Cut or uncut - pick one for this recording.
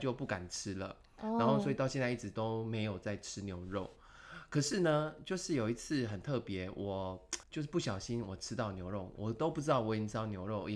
cut